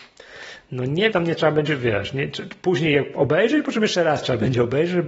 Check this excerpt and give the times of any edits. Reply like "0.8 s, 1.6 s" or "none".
1.1 s, 1.7 s